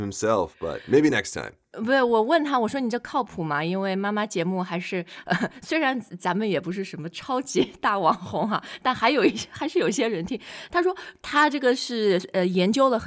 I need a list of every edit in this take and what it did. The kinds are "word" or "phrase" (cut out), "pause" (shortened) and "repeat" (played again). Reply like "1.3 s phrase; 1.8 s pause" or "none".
none